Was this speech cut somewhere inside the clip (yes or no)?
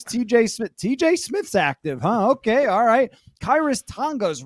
no